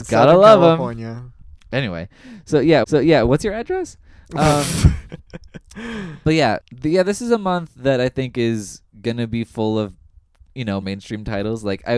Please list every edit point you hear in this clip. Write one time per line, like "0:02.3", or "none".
0:02.8
0:06.6
0:10.8